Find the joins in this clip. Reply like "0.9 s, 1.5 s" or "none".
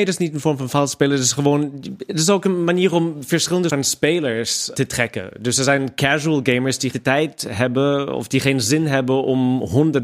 3.7 s, 4.7 s, 6.9 s